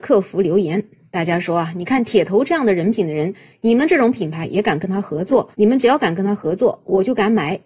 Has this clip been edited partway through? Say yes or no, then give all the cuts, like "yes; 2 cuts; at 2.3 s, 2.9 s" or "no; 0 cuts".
yes; 1 cut; at 5.5 s